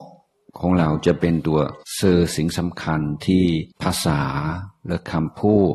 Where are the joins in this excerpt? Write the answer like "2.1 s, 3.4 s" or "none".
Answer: 1.8 s, 3.7 s

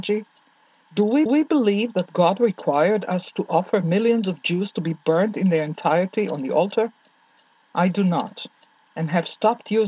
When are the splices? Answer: 1.3 s

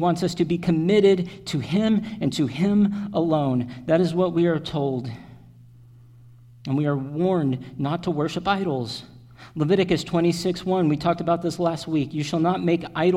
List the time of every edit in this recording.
none

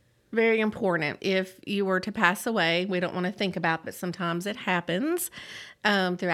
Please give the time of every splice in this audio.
1.2 s, 3.8 s

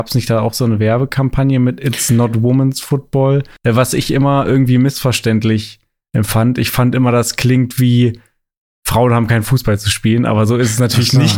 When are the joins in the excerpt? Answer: 3.6 s

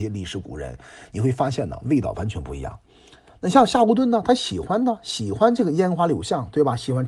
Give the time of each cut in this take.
none

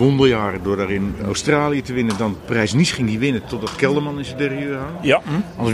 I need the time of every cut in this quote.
1.2 s

